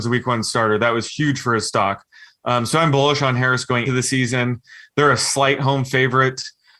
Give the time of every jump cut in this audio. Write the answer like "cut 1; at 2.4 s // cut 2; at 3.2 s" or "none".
cut 1; at 3.9 s